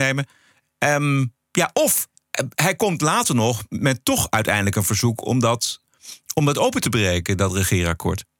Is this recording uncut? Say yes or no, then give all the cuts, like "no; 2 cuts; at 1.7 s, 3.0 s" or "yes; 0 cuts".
no; 1 cut; at 1.4 s